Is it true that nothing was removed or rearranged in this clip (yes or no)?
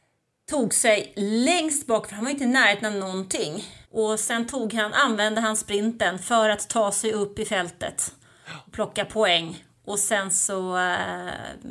no